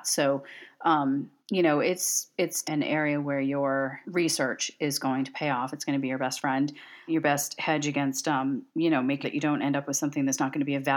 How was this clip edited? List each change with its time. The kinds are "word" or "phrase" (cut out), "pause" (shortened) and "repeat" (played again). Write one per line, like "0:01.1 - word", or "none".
0:01.4 - pause
0:02.3 - word
0:02.6 - word
0:04.0 - word
0:07.1 - word
0:08.7 - pause
0:09.2 - word